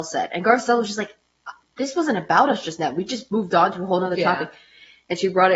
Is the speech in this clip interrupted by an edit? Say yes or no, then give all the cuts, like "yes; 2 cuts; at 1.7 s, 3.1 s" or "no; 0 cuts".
yes; 1 cut; at 1.6 s